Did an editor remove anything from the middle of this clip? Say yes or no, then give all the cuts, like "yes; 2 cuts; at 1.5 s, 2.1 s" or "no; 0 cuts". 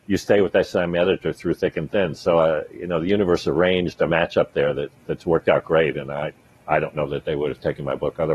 no; 0 cuts